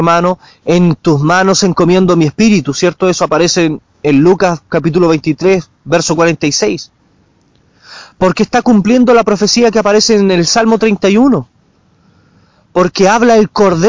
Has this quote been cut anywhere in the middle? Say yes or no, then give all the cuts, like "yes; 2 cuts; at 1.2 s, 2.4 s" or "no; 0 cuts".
no; 0 cuts